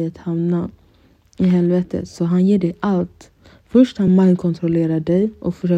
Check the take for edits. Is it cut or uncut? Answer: uncut